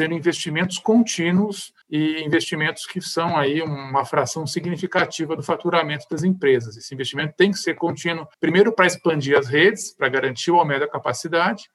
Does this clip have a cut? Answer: yes; 2 cuts; at 1.8 s, 8.3 s

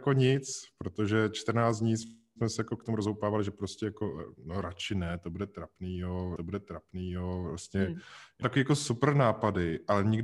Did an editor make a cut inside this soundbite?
yes; 2 cuts; at 6.4 s, 8.4 s

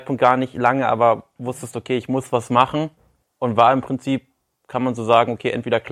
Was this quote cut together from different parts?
yes; 1 cut; at 3.2 s

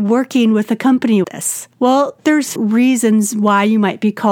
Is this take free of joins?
no; 3 cuts; at 1.2 s, 1.7 s, 2.6 s

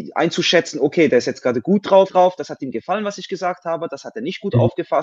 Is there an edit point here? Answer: yes; 1 cut; at 2.1 s

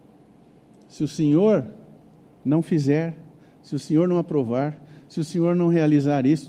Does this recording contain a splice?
no; 0 cuts

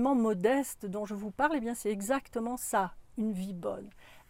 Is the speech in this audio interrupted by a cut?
no; 0 cuts

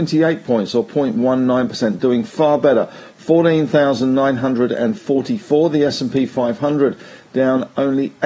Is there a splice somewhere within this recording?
no; 0 cuts

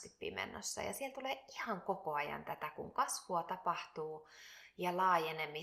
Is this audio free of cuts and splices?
yes; 0 cuts

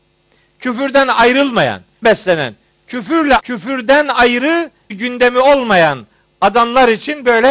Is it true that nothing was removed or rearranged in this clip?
no; 3 cuts; at 2.0 s, 3.4 s, 4.9 s

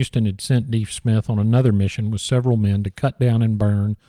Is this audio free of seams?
yes; 0 cuts

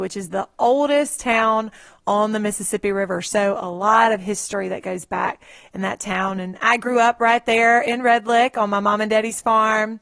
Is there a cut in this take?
no; 0 cuts

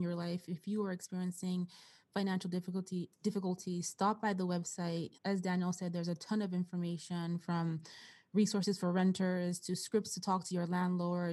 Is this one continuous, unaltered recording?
no; 1 cut; at 5.2 s

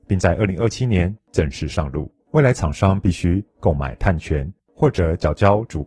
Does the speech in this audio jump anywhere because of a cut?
yes; 1 cut; at 2.2 s

